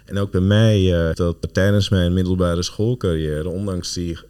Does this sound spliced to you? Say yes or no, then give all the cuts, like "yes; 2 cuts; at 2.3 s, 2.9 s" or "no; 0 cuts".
yes; 2 cuts; at 1.1 s, 1.4 s